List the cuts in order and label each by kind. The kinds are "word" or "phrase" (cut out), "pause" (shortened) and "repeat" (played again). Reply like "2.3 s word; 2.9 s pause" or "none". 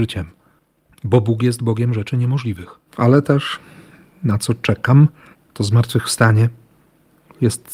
2.9 s pause; 5.3 s pause